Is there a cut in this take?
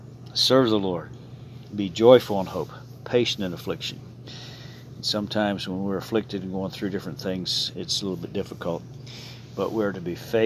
no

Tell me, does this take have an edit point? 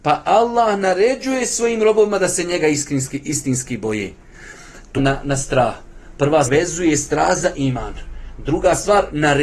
yes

